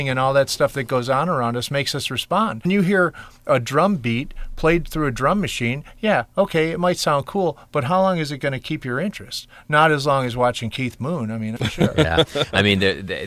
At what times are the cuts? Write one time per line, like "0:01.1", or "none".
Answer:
0:02.6
0:11.6